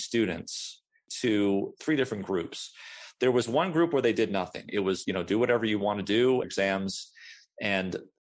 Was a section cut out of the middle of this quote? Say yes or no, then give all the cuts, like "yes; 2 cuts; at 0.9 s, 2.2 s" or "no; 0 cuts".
yes; 2 cuts; at 5.0 s, 6.4 s